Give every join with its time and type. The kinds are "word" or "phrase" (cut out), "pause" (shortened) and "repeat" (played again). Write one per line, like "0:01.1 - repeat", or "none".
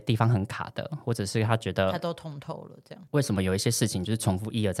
0:03.1 - pause